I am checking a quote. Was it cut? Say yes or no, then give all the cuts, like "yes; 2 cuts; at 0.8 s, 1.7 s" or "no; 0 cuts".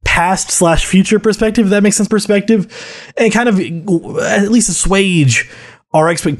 yes; 1 cut; at 2.1 s